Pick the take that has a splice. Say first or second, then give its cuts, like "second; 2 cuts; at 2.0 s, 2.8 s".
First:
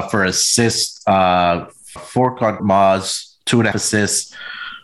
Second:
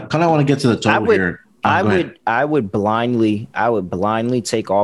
first; 3 cuts; at 2.0 s, 2.6 s, 3.7 s